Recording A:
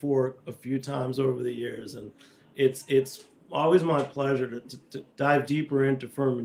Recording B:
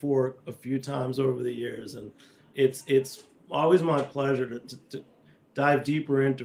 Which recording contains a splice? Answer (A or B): A